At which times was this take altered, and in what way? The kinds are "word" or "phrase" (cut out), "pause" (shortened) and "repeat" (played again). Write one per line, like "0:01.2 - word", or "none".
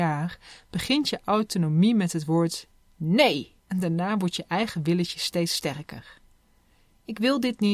0:03.6 - pause

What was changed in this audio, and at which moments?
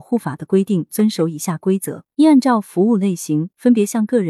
0:02.1 - pause

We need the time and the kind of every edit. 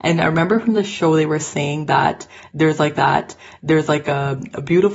0:02.9 - repeat

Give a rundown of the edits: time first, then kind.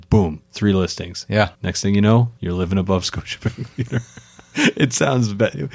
0:01.5 - pause
0:02.4 - pause

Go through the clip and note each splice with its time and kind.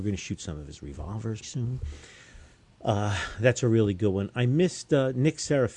0:01.4 - word

